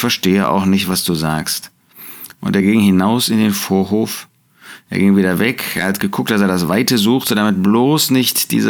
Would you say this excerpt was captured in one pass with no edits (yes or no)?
yes